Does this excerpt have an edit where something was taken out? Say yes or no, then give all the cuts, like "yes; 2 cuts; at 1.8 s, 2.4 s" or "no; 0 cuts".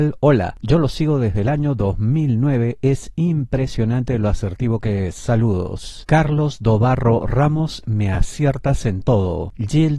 no; 0 cuts